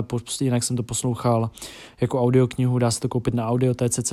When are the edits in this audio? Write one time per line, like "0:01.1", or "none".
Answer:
none